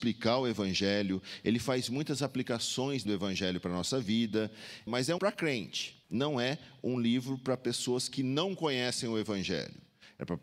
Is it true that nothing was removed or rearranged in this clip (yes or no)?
no